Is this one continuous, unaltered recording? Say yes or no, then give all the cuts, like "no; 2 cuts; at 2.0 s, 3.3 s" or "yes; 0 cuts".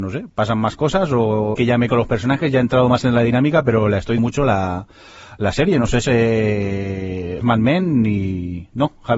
no; 5 cuts; at 1.5 s, 1.9 s, 4.2 s, 6.0 s, 7.4 s